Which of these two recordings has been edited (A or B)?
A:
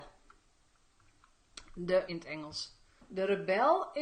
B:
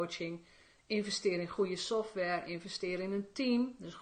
A